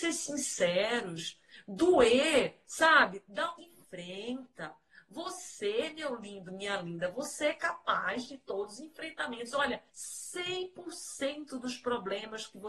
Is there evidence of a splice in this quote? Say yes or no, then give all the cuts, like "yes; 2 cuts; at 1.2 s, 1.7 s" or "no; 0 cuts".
yes; 2 cuts; at 3.6 s, 9.9 s